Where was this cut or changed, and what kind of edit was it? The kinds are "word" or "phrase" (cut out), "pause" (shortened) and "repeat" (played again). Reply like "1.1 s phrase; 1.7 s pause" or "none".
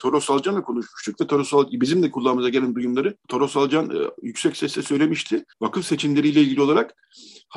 3.2 s pause; 5.5 s pause